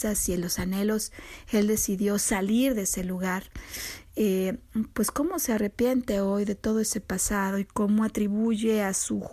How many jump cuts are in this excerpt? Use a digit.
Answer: 0